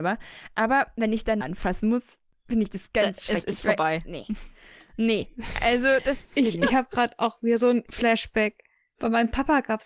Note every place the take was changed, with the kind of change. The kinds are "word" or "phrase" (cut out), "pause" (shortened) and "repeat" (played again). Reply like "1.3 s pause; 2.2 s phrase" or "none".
1.4 s phrase